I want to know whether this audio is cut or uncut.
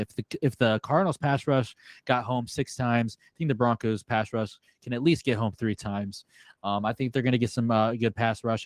uncut